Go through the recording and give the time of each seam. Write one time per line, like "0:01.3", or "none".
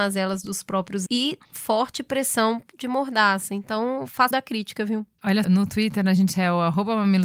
0:01.1
0:01.4
0:04.3
0:05.4